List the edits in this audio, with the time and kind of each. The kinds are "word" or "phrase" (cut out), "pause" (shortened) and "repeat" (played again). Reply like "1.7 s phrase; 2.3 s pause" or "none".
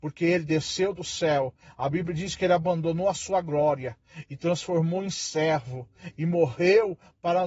none